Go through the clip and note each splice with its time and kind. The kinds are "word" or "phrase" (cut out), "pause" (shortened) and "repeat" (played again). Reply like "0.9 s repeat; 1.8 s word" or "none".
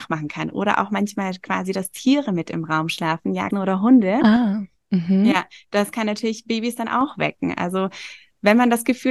3.5 s word